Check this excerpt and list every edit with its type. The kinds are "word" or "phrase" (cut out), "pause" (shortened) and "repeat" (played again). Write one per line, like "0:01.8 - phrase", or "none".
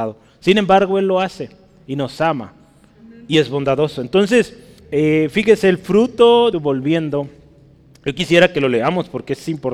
0:04.8 - pause
0:06.5 - phrase